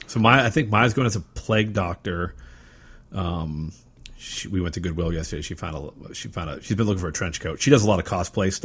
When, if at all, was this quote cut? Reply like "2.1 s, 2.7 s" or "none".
none